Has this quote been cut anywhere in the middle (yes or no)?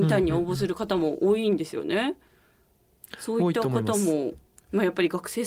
no